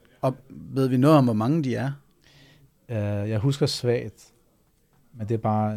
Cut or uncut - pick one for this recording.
uncut